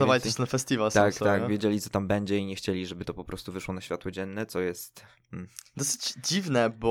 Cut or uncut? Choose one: uncut